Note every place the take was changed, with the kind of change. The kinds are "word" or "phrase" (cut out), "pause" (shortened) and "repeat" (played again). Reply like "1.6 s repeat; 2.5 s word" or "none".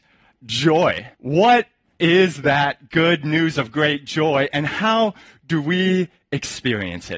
1.1 s pause